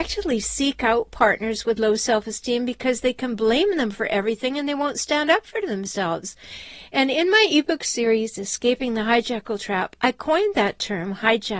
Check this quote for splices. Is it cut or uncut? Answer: uncut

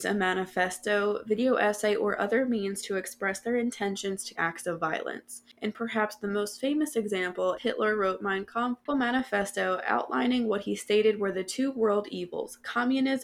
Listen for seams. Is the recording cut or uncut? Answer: cut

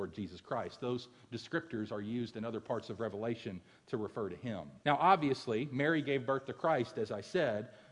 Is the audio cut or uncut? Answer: cut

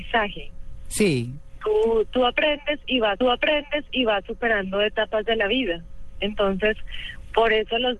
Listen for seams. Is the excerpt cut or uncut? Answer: cut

